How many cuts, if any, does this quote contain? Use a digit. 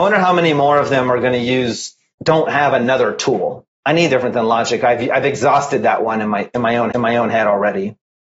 3